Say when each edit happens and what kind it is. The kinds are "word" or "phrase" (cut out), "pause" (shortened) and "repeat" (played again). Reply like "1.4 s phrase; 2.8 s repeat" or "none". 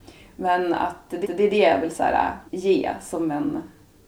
1.2 s repeat; 2.5 s pause